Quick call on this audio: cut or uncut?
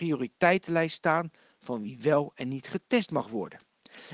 uncut